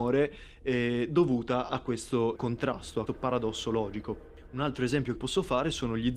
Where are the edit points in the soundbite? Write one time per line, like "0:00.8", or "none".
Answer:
0:02.4
0:03.1
0:05.2